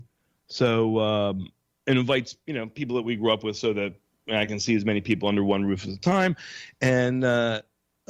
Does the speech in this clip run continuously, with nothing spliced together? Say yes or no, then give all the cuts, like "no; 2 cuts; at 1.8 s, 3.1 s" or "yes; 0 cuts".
yes; 0 cuts